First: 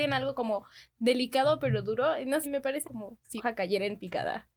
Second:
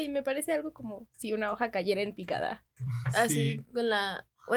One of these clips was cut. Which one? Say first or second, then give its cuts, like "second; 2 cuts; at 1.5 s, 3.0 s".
first; 3 cuts; at 2.4 s, 2.8 s, 3.4 s